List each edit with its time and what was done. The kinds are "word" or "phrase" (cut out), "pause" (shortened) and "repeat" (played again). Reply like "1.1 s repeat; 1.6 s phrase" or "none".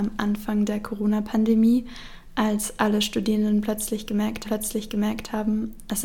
4.4 s repeat